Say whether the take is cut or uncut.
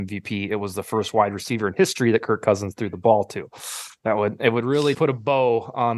cut